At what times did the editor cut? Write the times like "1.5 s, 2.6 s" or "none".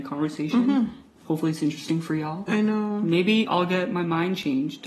2.5 s, 3.4 s